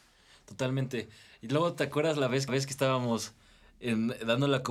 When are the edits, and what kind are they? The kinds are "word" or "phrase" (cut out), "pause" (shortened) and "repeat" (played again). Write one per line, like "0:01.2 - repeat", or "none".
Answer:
0:02.5 - repeat